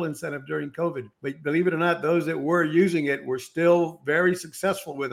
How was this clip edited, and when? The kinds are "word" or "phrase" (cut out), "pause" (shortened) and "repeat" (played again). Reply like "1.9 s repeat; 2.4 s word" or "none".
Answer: 1.1 s pause